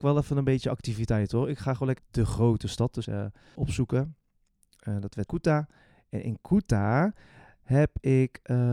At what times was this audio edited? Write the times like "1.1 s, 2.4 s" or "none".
2.0 s, 3.0 s, 3.6 s, 5.3 s